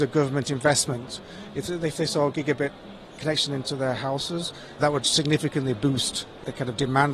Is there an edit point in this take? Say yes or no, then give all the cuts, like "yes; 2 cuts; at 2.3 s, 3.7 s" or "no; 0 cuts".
no; 0 cuts